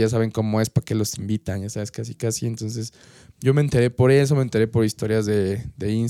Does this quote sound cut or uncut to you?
uncut